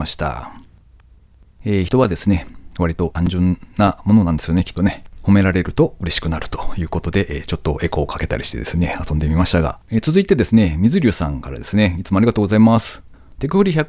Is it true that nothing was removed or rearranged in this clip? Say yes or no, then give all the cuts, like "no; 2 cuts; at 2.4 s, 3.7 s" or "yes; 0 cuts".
no; 1 cut; at 9.8 s